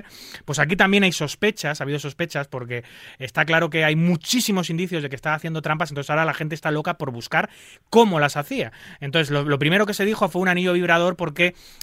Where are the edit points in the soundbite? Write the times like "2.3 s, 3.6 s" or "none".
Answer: none